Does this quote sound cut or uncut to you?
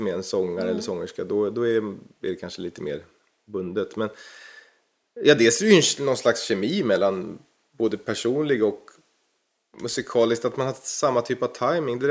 uncut